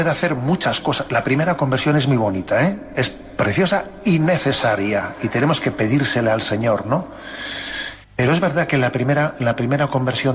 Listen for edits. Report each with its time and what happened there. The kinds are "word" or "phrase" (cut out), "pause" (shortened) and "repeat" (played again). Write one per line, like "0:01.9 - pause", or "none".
0:08.0 - pause